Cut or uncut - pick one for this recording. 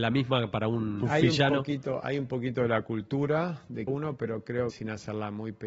cut